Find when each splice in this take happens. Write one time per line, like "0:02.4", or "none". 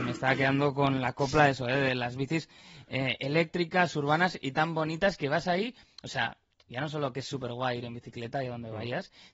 none